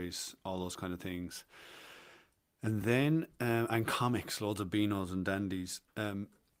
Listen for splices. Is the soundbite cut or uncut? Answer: uncut